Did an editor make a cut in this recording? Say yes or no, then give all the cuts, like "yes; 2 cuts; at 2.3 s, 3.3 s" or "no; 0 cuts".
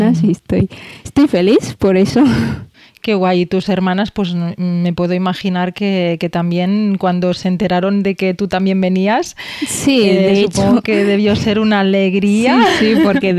yes; 1 cut; at 2.7 s